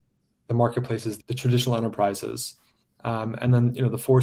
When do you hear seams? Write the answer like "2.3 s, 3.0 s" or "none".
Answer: 1.2 s